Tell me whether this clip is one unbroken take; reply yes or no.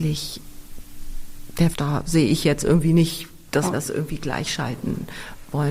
no